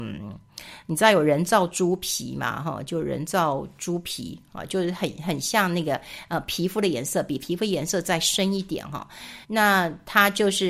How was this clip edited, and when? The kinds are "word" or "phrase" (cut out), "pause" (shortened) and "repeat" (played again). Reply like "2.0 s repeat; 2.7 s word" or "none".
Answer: 9.4 s pause